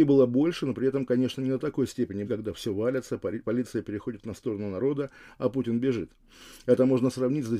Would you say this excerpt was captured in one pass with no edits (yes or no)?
no